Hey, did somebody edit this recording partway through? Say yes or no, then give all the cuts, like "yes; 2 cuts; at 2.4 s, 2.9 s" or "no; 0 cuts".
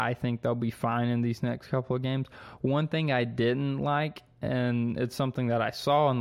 no; 0 cuts